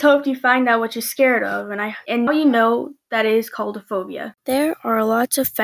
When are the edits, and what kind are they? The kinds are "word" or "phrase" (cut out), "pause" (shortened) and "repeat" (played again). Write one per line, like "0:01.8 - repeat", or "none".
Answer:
0:02.3 - word